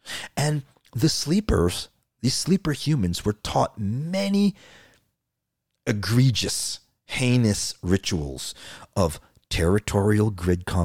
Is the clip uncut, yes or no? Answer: yes